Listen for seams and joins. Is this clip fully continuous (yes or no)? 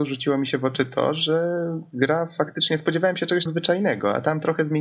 no